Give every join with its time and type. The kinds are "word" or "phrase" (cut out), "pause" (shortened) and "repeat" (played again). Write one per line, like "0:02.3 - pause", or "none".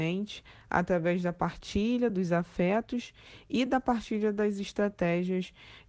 none

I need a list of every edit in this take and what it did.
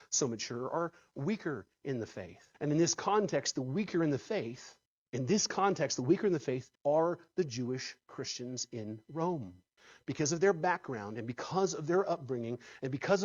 0:02.5 - pause
0:04.9 - pause
0:06.8 - pause
0:09.8 - pause

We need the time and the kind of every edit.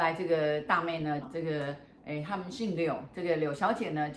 0:01.2 - phrase

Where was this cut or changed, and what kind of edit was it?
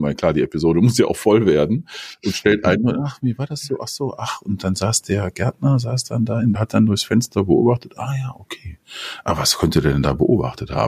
0:06.5 - phrase

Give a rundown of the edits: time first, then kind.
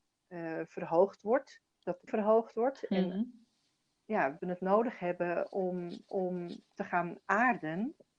0:01.7 - pause
0:02.1 - word
0:04.4 - word
0:06.1 - repeat

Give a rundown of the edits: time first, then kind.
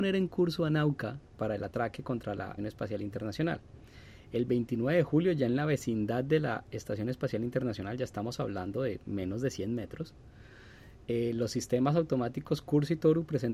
0:02.6 - word

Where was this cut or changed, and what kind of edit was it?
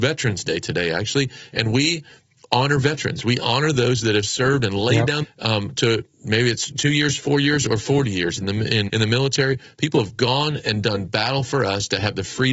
0:05.2 - phrase
0:08.9 - word

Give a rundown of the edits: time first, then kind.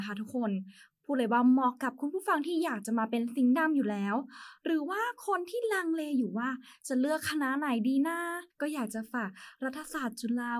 0:08.5 - pause

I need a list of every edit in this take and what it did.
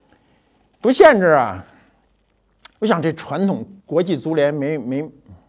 0:02.7 - pause
0:03.8 - pause

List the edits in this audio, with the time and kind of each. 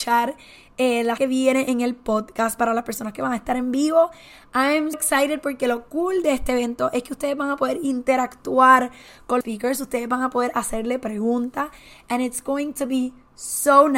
0:01.2 - word
0:04.9 - word
0:09.4 - word

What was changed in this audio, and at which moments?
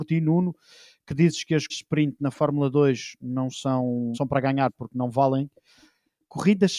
0:01.7 - word
0:04.1 - word

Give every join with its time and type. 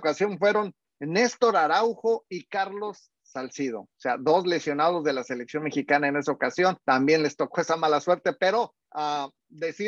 0:03.9 - pause
0:06.8 - pause
0:08.8 - pause

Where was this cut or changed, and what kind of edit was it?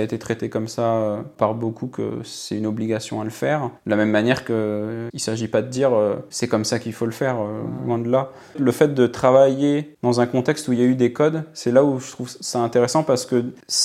0:03.8 - pause

